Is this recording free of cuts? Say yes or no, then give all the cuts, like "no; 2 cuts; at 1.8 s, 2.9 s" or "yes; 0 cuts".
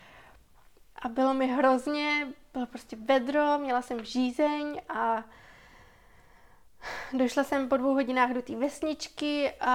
yes; 0 cuts